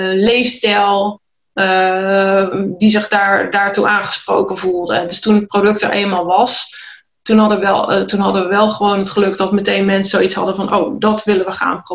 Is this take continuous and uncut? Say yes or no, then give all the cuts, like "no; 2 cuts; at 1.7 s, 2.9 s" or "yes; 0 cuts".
yes; 0 cuts